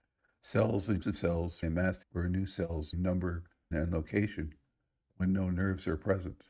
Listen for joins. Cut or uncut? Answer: cut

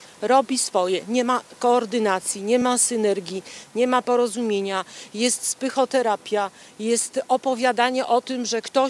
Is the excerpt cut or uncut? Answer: uncut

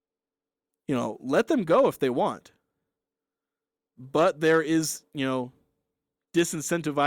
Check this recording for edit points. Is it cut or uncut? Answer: uncut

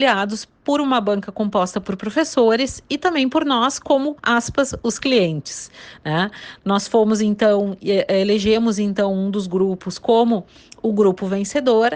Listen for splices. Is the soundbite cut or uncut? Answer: cut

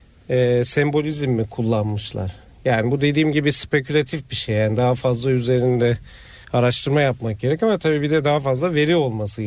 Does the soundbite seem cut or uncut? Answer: cut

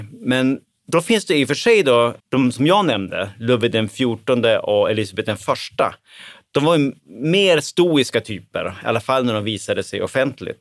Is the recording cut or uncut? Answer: cut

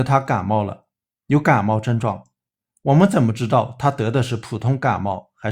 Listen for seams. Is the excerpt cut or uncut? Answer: uncut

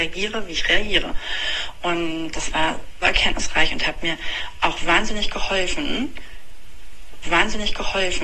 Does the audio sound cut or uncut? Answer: cut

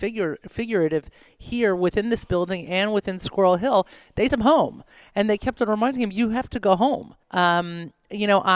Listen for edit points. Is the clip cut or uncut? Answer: cut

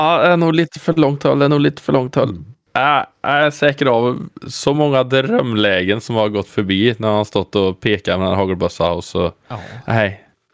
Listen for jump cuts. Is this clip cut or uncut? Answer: uncut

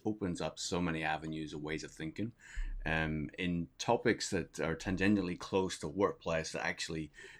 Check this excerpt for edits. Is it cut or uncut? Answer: uncut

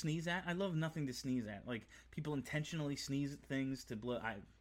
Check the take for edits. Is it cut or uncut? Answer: uncut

